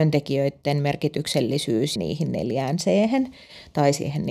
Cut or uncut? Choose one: cut